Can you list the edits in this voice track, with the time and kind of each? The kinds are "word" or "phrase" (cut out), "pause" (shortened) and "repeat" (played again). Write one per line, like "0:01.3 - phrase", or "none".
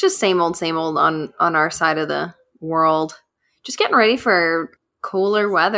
none

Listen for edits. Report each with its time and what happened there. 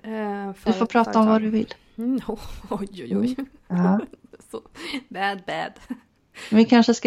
none

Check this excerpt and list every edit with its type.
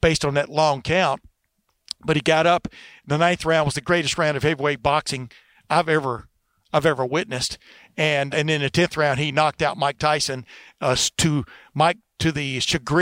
0:08.3 - word

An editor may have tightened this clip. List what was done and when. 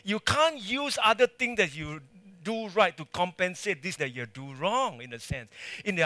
0:04.0 - word

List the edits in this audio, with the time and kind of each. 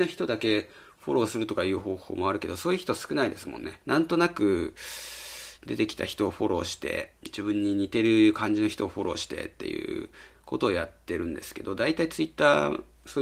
0:03.8 - pause
0:07.2 - pause

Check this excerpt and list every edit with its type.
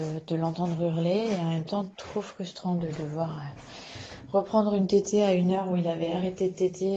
none

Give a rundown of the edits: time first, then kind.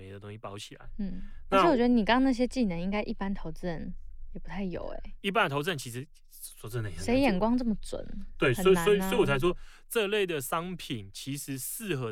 0:05.2 - word

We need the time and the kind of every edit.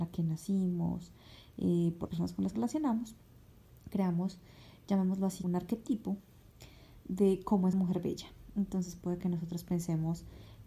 0:02.1 - word
0:02.6 - word
0:05.4 - word
0:07.7 - word

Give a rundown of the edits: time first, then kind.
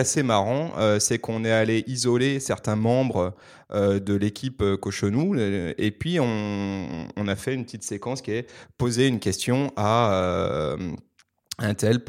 none

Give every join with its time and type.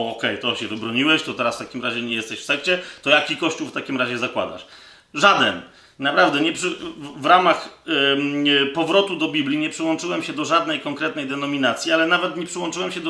none

